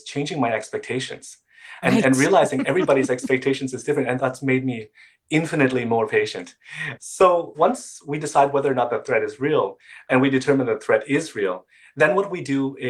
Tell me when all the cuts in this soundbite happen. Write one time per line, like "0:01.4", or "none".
0:01.8